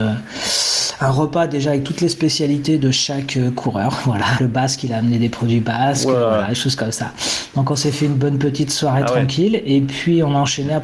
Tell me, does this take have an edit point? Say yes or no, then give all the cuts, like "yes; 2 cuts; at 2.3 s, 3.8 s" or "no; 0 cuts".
yes; 1 cut; at 4.4 s